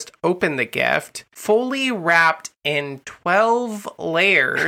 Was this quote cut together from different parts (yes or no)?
no